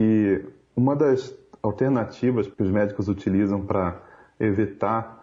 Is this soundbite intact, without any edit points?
yes; 0 cuts

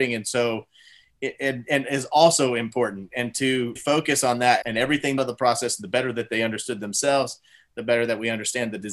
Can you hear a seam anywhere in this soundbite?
yes; 3 cuts; at 3.8 s, 4.6 s, 5.2 s

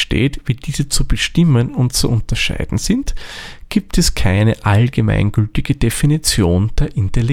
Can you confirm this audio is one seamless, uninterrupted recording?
yes; 0 cuts

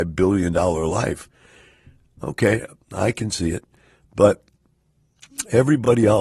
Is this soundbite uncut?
yes; 0 cuts

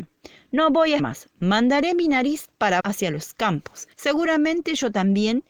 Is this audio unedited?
no; 3 cuts; at 1.0 s, 2.8 s, 3.9 s

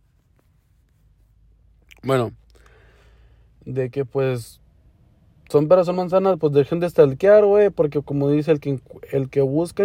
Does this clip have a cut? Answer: no; 0 cuts

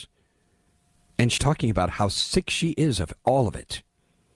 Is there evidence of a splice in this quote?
yes; 1 cut; at 1.4 s

